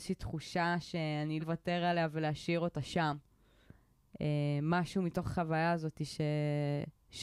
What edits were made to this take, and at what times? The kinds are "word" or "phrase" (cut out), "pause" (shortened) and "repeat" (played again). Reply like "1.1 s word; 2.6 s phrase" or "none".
1.4 s phrase